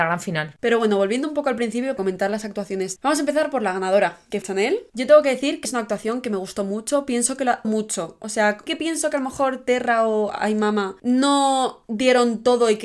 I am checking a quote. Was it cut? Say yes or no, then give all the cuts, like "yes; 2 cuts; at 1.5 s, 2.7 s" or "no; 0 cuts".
yes; 6 cuts; at 2.0 s, 3.0 s, 4.4 s, 5.6 s, 7.6 s, 8.7 s